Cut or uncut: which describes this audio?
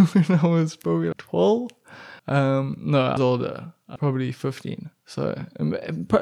cut